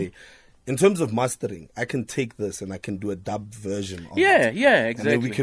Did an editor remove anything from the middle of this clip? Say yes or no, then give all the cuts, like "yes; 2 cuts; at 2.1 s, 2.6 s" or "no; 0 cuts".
no; 0 cuts